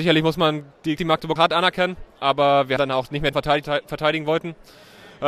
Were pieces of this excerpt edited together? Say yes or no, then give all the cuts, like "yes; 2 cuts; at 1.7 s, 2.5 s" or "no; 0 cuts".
yes; 5 cuts; at 1.0 s, 1.4 s, 2.8 s, 3.3 s, 3.6 s